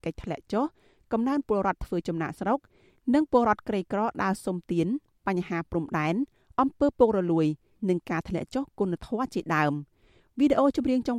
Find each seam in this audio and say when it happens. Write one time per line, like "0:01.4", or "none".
none